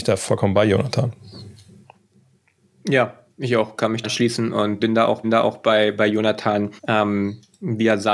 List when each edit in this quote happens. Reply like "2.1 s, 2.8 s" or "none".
2.4 s, 4.0 s, 4.8 s, 5.2 s, 6.8 s